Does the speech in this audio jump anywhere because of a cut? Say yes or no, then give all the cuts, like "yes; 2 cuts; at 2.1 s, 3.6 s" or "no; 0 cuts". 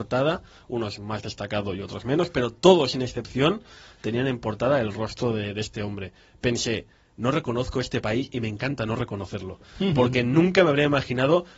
no; 0 cuts